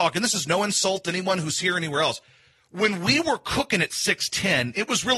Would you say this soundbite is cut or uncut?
uncut